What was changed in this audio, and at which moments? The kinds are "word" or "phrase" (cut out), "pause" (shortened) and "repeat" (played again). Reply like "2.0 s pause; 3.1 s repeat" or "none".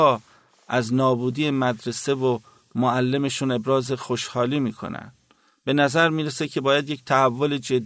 none